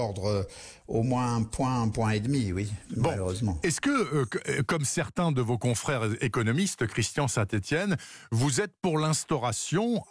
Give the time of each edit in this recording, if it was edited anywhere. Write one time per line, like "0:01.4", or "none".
none